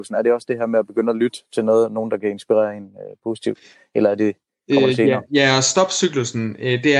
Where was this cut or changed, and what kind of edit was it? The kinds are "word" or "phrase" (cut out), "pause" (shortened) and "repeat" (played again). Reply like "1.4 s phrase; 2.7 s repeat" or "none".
none